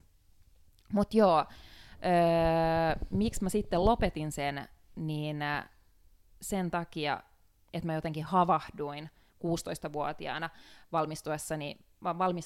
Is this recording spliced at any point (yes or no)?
no